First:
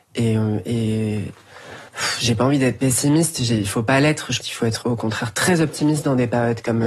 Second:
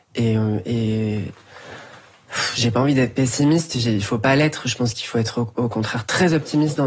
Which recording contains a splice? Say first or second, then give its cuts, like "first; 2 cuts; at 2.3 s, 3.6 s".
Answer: first; 3 cuts; at 1.9 s, 4.4 s, 4.8 s